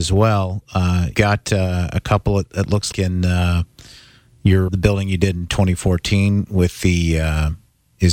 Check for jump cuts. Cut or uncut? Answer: cut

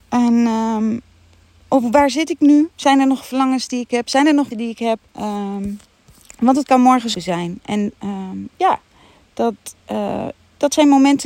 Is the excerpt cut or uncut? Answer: cut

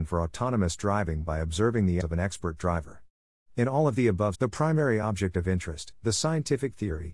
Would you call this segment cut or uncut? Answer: cut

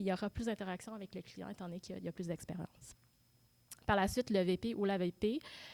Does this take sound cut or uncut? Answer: uncut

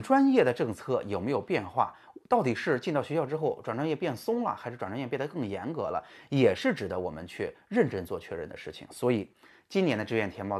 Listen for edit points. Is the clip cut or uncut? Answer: uncut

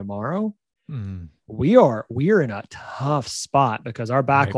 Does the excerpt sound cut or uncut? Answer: uncut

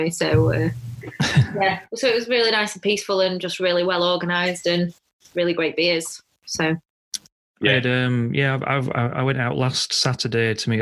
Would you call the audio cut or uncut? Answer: uncut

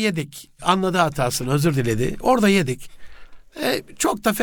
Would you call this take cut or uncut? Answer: uncut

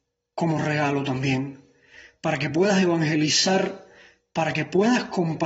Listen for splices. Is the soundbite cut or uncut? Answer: uncut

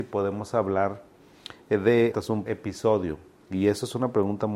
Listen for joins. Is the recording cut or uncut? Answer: cut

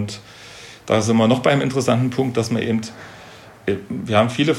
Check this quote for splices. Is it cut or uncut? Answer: uncut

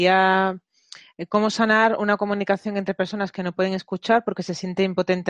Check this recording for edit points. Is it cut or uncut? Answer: uncut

